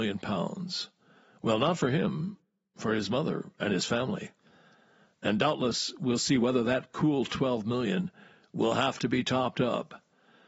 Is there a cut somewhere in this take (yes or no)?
no